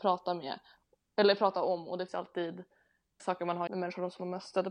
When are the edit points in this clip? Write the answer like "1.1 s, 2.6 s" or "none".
2.1 s, 3.2 s, 3.7 s